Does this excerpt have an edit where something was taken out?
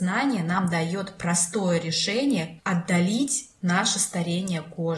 yes; 1 cut; at 2.6 s

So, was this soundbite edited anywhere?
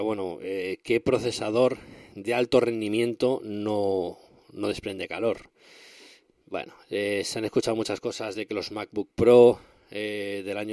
no; 0 cuts

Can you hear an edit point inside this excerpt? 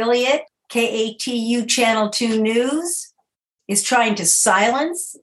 no; 0 cuts

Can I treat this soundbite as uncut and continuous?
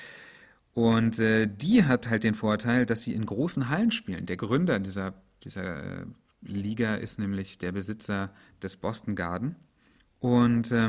yes; 0 cuts

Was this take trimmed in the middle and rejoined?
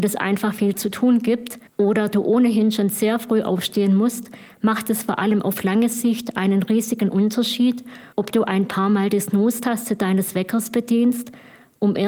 yes; 2 cuts; at 1.7 s, 8.1 s

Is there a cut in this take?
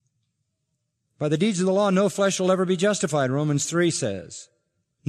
no; 0 cuts

